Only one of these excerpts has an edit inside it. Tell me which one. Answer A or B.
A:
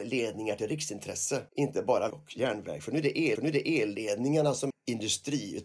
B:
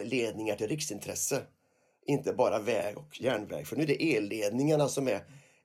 A